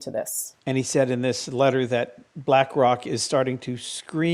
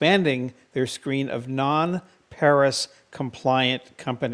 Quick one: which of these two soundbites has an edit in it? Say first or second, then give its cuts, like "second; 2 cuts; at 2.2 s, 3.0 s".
first; 1 cut; at 2.3 s